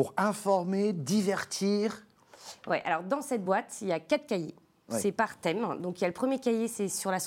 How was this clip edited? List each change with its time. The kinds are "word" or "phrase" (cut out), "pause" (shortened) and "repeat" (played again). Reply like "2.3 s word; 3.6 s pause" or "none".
none